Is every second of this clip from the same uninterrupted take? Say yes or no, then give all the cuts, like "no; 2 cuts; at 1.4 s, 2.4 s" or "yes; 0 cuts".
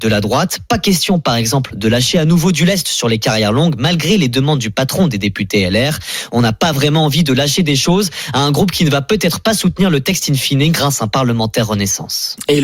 yes; 0 cuts